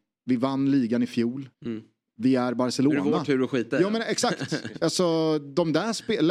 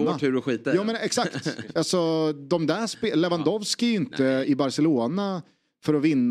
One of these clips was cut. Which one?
first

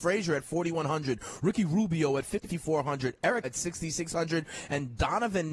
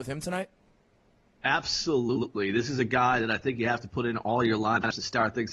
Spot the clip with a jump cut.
first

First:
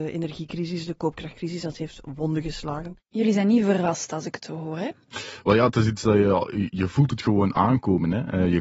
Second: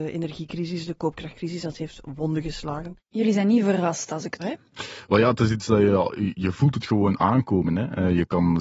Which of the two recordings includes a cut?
second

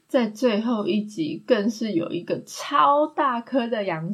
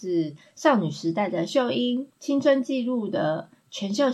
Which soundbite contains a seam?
second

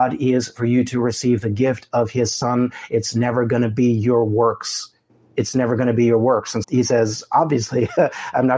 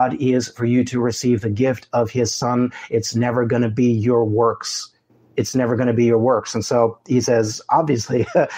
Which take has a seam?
first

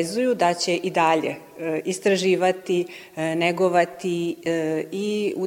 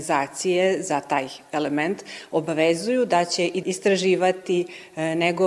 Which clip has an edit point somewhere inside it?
second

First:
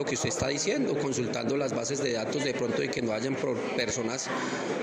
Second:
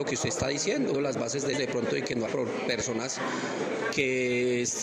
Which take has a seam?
second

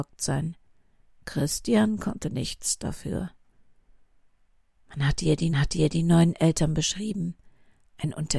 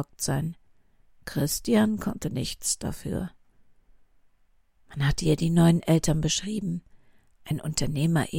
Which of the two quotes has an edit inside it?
first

